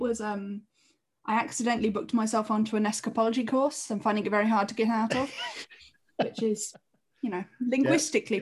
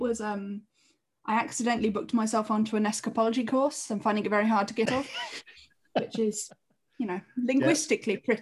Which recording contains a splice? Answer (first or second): second